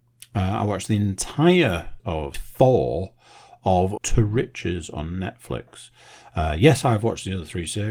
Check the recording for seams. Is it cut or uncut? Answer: cut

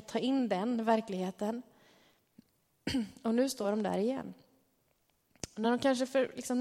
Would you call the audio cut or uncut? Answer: uncut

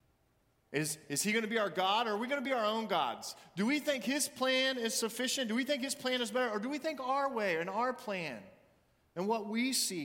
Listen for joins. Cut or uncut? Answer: uncut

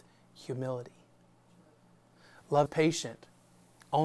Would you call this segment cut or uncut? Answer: cut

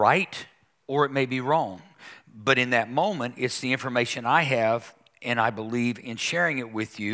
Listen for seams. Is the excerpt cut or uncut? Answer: uncut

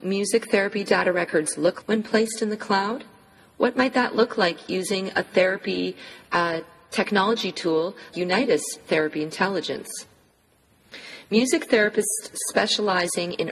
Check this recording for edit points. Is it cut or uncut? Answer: cut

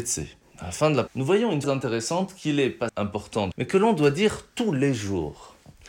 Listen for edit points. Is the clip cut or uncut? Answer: cut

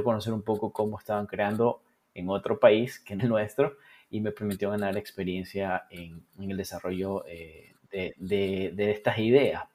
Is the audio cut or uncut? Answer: cut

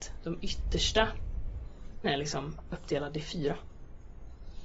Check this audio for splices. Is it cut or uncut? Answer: cut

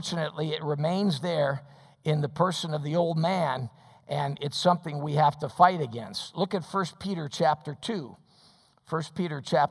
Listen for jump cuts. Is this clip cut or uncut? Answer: uncut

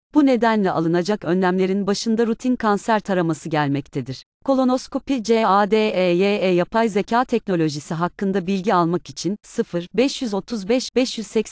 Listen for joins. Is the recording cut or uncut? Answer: cut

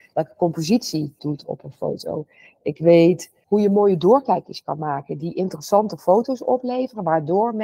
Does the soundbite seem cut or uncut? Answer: cut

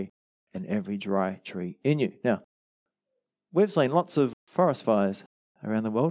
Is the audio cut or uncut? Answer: uncut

